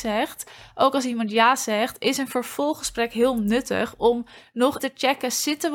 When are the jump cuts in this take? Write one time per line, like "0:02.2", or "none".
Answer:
0:04.8